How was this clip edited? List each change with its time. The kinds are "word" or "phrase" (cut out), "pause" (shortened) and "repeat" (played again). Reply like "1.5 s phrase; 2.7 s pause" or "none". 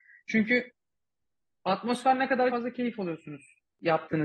2.5 s phrase